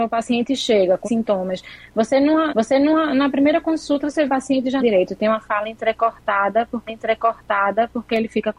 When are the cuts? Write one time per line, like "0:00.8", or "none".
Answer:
0:01.0
0:02.5
0:04.3
0:04.8
0:06.9